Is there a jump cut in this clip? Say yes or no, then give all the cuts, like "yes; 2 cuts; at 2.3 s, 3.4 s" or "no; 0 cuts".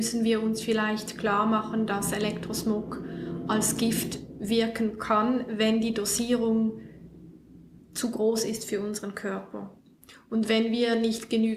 no; 0 cuts